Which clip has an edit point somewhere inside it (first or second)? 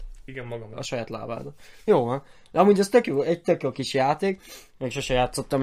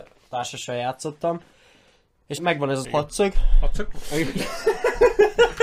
second